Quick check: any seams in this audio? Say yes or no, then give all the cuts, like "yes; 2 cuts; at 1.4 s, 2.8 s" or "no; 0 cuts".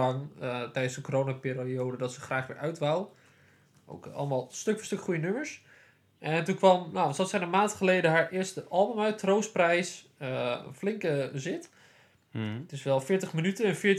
no; 0 cuts